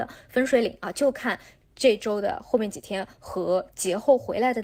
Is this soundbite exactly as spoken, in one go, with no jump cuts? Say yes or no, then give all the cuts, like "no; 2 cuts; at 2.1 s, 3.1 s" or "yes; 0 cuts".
yes; 0 cuts